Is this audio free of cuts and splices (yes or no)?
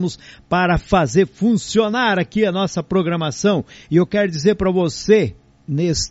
yes